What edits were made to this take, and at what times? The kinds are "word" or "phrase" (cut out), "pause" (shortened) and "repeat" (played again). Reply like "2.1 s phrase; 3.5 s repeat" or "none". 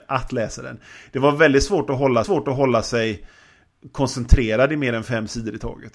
2.2 s repeat